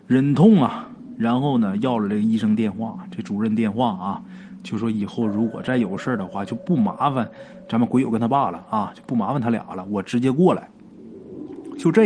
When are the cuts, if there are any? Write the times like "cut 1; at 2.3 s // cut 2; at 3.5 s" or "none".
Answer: cut 1; at 1.2 s